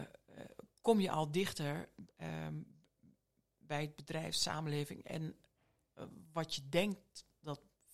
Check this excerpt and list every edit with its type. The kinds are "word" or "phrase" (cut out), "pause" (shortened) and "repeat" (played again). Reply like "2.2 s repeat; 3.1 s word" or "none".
none